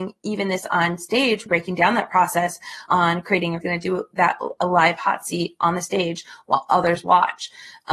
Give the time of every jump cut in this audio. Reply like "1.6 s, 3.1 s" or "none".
1.5 s, 2.9 s, 3.6 s